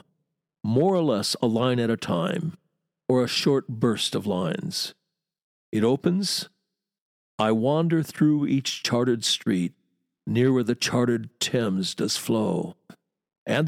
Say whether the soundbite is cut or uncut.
uncut